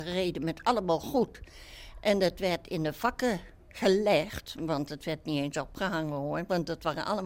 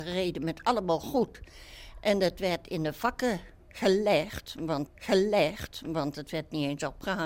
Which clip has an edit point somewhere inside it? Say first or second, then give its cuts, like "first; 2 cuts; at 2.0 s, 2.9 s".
second; 1 cut; at 4.9 s